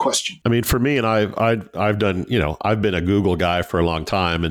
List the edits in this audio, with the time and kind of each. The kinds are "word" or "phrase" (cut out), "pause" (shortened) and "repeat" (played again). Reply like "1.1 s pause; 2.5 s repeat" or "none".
none